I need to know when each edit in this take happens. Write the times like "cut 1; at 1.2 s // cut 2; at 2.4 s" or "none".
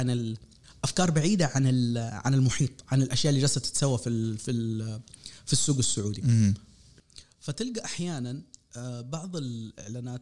none